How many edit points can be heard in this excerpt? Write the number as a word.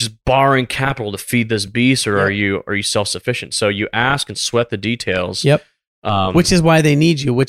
zero